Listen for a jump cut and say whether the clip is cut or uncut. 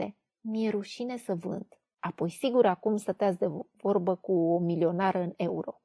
uncut